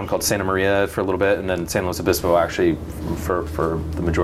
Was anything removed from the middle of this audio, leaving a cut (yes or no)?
no